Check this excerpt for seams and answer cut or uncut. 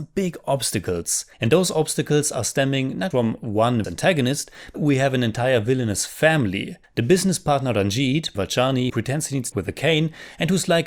cut